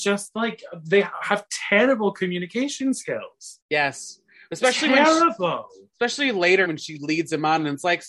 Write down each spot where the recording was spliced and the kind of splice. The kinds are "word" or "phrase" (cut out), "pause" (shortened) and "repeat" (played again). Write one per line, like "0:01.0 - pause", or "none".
0:03.6 - pause
0:06.6 - word